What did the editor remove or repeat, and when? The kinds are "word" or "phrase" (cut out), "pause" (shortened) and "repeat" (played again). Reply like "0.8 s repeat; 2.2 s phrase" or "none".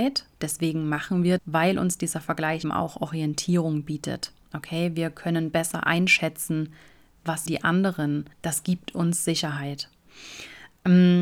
1.4 s phrase; 2.6 s word; 7.5 s word; 8.3 s pause